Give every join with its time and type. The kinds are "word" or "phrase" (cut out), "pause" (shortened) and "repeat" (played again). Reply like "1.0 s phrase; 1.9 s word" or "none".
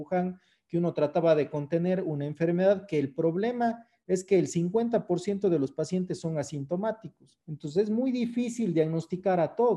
7.4 s pause